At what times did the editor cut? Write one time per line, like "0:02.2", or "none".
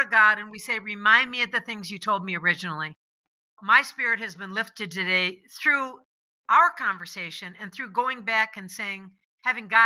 none